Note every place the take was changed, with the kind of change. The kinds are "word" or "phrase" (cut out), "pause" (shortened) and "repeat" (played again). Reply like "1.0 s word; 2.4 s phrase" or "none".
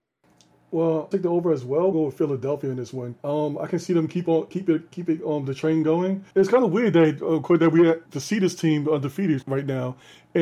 1.1 s phrase; 1.9 s phrase; 3.2 s pause; 6.3 s pause; 8.1 s word; 9.4 s word